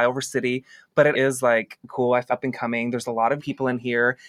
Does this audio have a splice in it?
yes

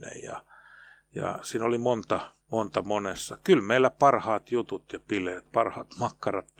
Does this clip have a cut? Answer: yes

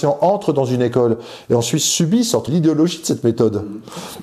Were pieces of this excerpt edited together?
yes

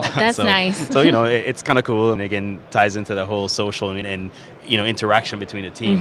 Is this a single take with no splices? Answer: no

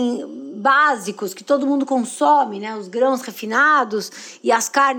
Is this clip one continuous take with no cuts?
yes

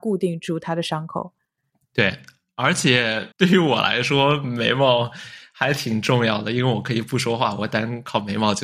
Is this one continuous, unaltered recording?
no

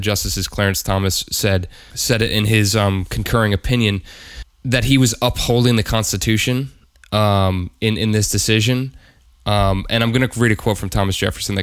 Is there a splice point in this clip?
no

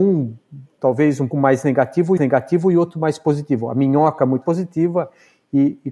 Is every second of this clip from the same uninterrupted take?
no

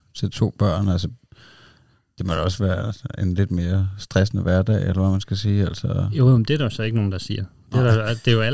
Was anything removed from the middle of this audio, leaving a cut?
no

